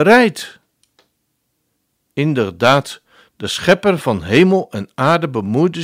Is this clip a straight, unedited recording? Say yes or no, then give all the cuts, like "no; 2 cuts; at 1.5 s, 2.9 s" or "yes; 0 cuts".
yes; 0 cuts